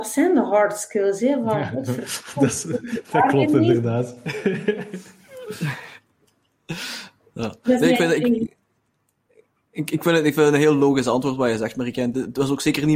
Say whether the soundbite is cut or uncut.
uncut